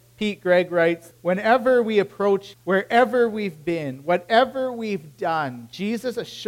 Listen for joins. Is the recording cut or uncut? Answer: cut